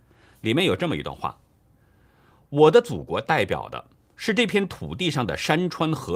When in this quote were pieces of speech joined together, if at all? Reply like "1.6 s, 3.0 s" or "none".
none